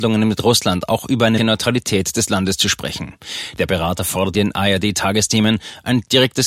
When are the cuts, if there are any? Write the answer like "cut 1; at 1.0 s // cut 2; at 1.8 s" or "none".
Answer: cut 1; at 1.4 s // cut 2; at 4.3 s

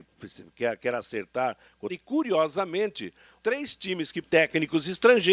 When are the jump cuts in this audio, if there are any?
cut 1; at 1.9 s // cut 2; at 3.4 s // cut 3; at 4.2 s

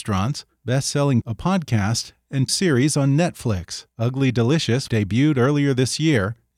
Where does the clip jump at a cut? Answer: cut 1; at 1.2 s // cut 2; at 2.5 s // cut 3; at 3.9 s // cut 4; at 4.9 s

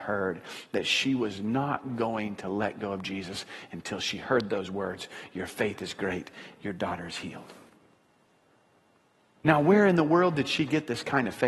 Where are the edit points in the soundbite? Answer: none

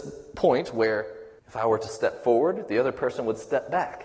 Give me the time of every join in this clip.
cut 1; at 1.4 s

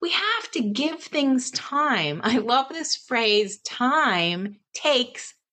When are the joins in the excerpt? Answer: none

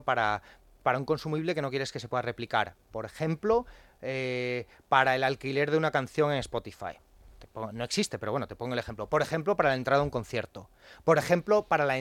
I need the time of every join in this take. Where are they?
none

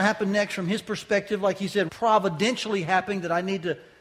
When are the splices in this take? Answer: cut 1; at 1.9 s

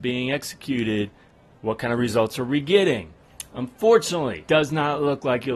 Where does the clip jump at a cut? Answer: cut 1; at 4.5 s

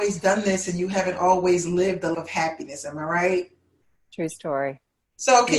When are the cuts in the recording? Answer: cut 1; at 2.1 s

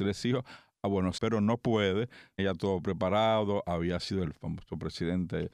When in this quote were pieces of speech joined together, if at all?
cut 1; at 1.2 s // cut 2; at 2.4 s // cut 3; at 4.2 s

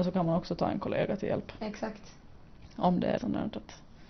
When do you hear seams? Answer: cut 1; at 3.2 s

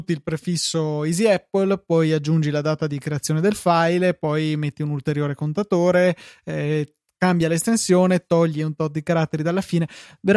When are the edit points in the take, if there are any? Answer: none

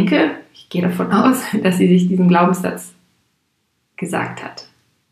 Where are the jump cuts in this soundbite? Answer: none

